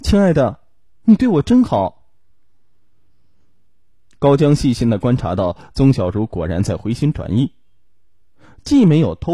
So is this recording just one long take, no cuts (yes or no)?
yes